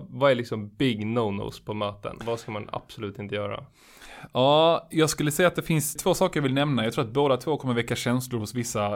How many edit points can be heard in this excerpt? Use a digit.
0